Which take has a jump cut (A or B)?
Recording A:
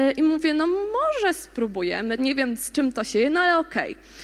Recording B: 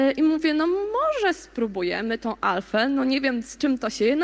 A